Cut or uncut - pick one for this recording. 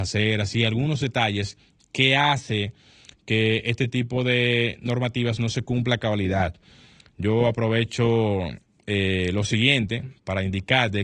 uncut